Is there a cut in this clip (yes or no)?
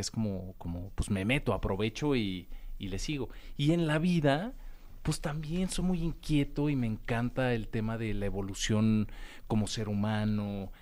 no